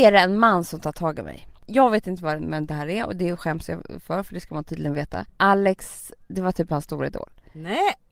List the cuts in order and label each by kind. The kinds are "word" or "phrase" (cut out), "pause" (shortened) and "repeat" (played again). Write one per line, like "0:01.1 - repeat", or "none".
0:01.6 - pause
0:05.3 - pause